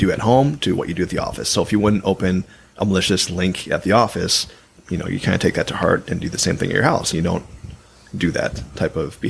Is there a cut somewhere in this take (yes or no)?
no